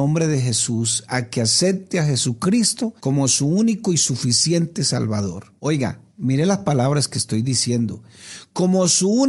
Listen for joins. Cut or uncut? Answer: cut